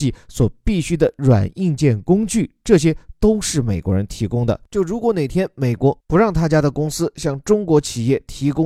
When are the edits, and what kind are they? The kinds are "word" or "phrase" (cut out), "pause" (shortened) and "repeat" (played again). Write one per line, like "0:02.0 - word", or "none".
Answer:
0:04.7 - pause
0:06.0 - pause